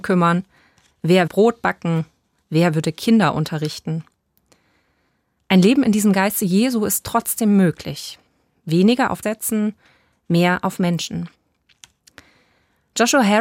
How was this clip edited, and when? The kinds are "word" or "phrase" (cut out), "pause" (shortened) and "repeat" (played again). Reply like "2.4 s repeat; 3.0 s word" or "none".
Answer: 1.3 s word; 9.2 s word